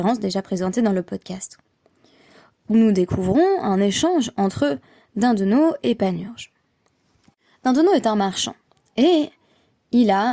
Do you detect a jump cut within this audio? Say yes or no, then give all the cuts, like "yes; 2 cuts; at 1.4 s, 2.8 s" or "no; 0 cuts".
no; 0 cuts